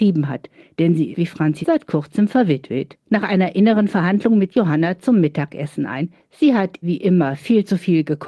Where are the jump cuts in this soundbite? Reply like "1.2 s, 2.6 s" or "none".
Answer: 1.1 s, 1.6 s, 3.0 s, 4.5 s, 6.8 s